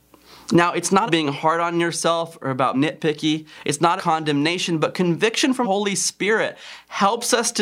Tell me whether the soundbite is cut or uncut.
cut